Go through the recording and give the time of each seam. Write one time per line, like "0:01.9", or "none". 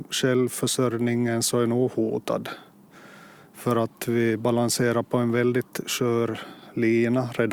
none

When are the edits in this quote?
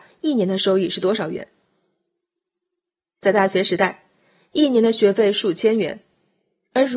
none

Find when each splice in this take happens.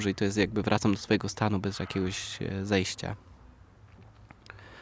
none

